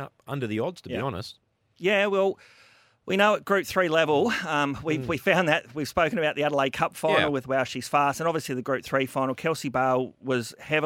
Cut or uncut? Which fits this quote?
uncut